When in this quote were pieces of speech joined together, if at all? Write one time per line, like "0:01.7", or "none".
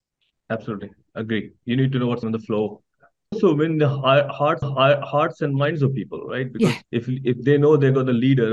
0:02.2
0:03.3
0:04.6
0:06.8